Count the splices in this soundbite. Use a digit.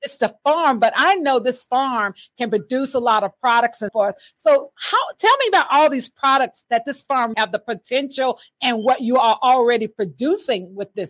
2